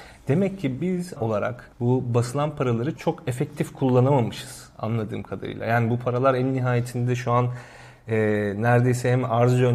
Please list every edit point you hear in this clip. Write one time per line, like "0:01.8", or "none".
0:01.2
0:01.7
0:03.0